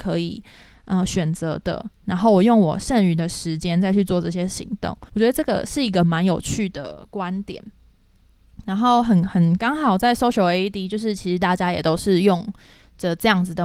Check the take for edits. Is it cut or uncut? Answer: cut